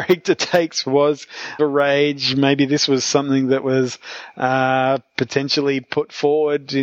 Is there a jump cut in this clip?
yes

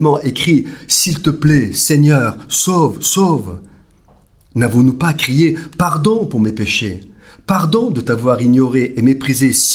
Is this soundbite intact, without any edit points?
yes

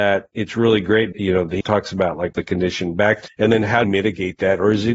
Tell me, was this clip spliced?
yes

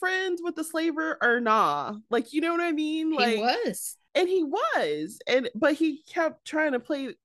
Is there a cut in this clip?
no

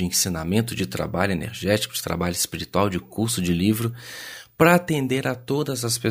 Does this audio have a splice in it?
no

